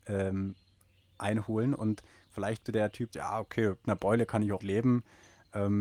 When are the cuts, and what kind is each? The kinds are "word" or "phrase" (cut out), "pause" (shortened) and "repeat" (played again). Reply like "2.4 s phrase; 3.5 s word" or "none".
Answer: 2.7 s word; 3.1 s word; 3.8 s word; 4.6 s word